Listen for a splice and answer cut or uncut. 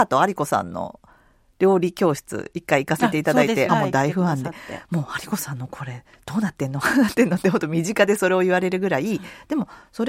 cut